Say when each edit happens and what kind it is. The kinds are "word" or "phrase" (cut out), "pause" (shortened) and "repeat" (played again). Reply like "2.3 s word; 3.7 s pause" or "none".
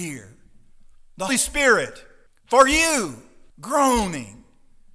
1.3 s word; 2.3 s pause; 3.5 s pause